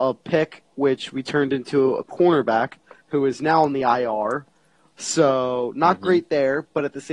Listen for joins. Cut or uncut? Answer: uncut